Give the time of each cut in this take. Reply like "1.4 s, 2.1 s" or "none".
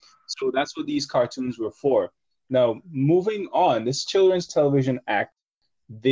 none